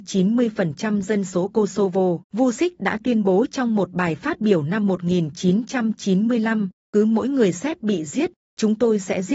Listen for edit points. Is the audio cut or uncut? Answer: cut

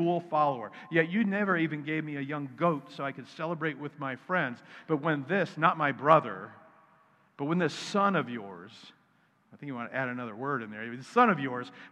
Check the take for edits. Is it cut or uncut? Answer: uncut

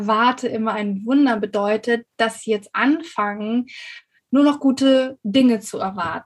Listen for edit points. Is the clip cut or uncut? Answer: uncut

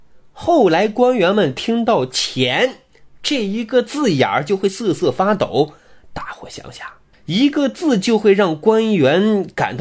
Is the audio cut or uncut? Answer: uncut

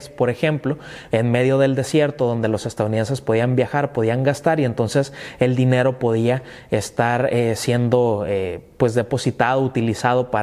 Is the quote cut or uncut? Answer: uncut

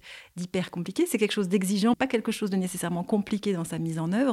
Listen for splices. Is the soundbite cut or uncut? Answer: cut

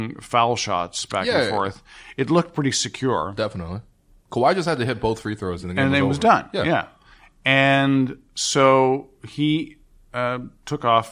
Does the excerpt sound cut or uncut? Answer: uncut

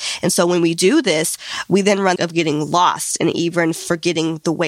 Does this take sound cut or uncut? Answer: cut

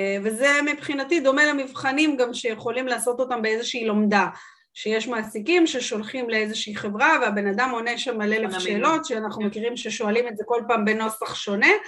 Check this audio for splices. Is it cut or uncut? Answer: uncut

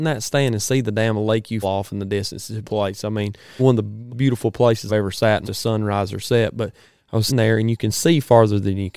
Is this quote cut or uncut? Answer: cut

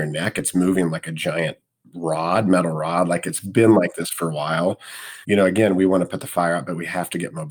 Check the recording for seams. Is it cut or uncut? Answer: uncut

